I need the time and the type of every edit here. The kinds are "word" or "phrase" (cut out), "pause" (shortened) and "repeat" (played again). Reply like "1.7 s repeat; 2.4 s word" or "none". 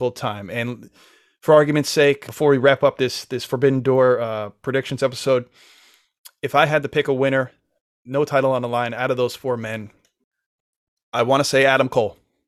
2.3 s word

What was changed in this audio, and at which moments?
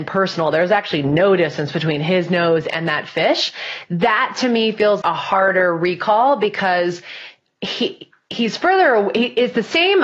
5.0 s word

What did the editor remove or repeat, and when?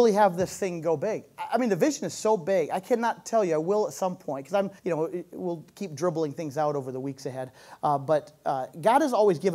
4.8 s pause

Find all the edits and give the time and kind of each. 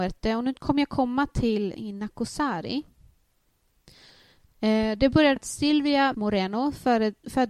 1.7 s word; 5.4 s word; 6.1 s word

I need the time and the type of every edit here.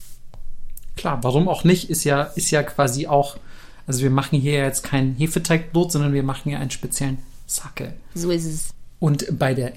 none

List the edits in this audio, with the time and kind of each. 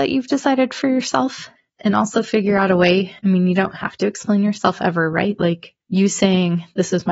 1.6 s pause; 3.2 s pause; 5.8 s pause

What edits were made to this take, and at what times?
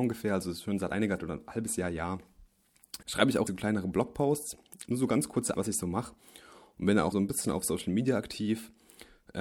1.2 s word; 3.0 s word; 3.5 s word; 4.8 s word; 5.5 s word; 7.1 s word

